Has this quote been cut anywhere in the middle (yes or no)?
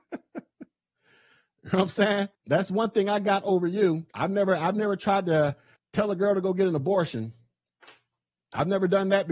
yes